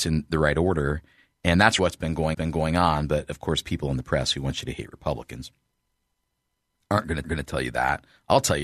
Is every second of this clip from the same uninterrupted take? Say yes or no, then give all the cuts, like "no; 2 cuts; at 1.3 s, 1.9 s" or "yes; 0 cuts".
no; 3 cuts; at 1.8 s, 2.3 s, 7.2 s